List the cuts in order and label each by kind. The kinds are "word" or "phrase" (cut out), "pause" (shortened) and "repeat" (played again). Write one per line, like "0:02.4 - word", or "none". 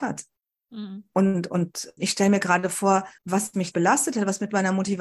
0:02.0 - word
0:03.2 - pause
0:03.7 - word